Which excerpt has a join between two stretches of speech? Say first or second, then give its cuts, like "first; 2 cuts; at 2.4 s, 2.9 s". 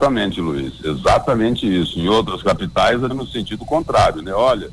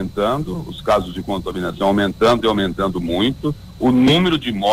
first; 1 cut; at 3.1 s